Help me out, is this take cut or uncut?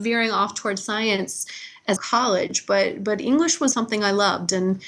cut